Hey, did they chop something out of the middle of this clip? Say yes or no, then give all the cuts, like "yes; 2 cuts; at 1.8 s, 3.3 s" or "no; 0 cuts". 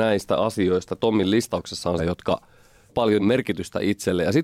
yes; 4 cuts; at 1.0 s, 2.0 s, 2.9 s, 3.2 s